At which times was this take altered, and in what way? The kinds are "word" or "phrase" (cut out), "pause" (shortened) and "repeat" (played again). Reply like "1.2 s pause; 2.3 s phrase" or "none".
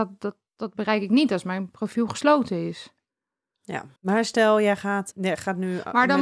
4.0 s pause; 5.1 s word